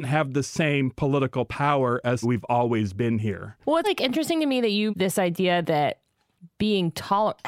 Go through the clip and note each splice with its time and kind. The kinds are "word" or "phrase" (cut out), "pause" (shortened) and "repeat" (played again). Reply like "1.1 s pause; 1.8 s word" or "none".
2.2 s word; 3.8 s word; 4.9 s word